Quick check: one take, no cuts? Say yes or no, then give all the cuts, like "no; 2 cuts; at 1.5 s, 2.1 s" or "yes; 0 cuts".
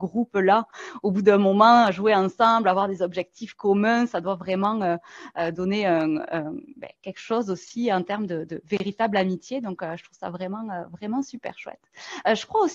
yes; 0 cuts